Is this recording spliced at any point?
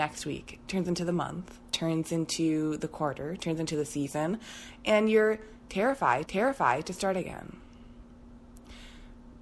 yes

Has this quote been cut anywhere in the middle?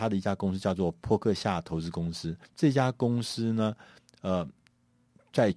yes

